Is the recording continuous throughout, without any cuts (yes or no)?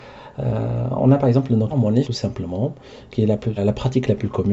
no